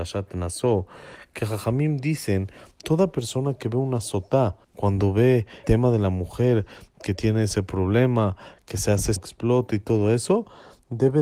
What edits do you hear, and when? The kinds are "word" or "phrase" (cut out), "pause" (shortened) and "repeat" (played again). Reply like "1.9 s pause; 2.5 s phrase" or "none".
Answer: 4.6 s pause; 5.6 s word; 9.2 s phrase